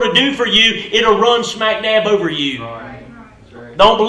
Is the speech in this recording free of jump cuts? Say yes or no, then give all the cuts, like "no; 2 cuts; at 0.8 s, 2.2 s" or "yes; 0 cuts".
yes; 0 cuts